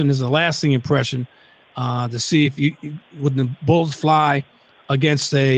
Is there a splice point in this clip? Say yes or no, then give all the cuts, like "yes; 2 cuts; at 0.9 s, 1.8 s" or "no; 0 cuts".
no; 0 cuts